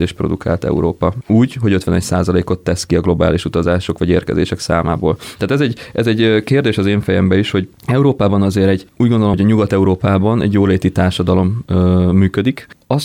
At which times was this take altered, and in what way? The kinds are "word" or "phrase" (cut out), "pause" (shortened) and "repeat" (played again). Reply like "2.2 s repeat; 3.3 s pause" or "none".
9.3 s word